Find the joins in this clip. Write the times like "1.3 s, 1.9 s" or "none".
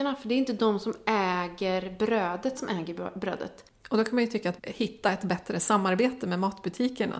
2.5 s, 4.6 s